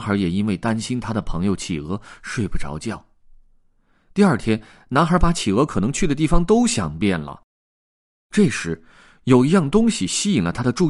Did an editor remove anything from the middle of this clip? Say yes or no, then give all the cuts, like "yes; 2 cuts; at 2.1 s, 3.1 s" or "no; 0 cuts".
no; 0 cuts